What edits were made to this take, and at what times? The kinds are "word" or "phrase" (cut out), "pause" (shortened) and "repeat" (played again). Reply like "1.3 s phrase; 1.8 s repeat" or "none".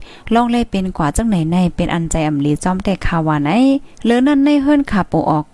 3.9 s pause